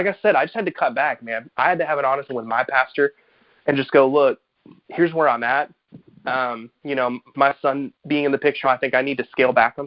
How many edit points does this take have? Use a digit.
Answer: 3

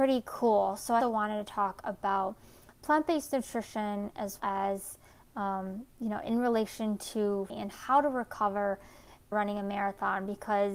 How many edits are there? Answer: 4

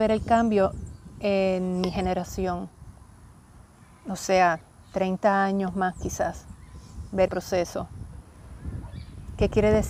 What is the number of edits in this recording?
1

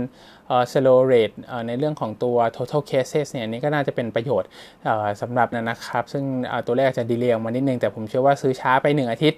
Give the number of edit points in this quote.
1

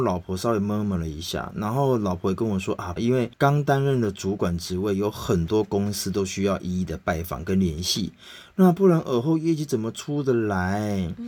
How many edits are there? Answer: 1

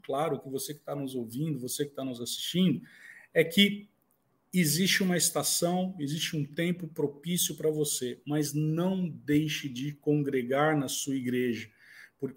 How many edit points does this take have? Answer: 0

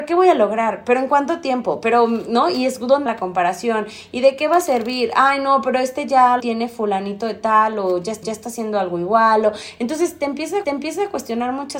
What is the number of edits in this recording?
4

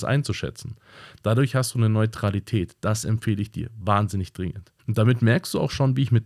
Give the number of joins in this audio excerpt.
1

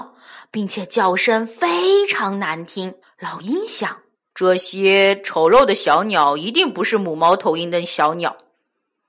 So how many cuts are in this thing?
2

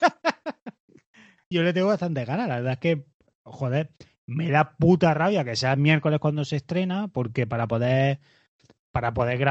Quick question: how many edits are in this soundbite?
1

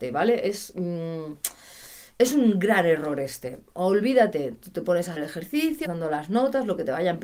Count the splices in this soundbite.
2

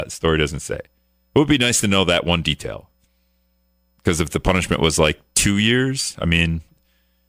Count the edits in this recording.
0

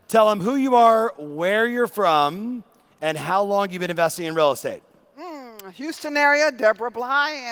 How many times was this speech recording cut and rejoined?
0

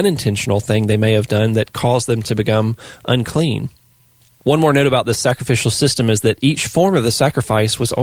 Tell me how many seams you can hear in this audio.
0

